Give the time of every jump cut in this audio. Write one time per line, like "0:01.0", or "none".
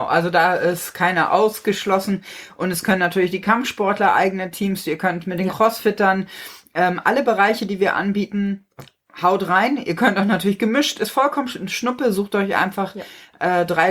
none